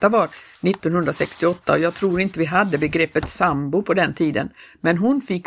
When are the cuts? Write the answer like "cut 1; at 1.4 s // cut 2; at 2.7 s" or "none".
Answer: none